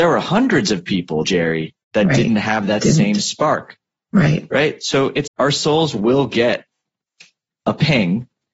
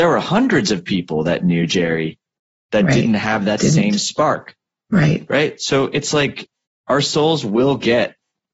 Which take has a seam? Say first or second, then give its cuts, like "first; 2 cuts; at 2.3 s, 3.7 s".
first; 3 cuts; at 1.2 s, 1.8 s, 5.3 s